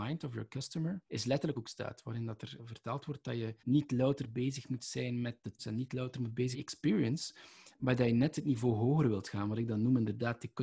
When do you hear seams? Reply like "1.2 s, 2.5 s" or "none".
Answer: 1.1 s, 1.5 s, 2.6 s, 3.6 s, 5.6 s, 6.5 s